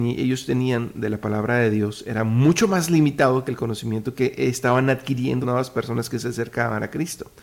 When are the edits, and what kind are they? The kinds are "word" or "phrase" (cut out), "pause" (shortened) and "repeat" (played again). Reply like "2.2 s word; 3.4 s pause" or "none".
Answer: 5.4 s word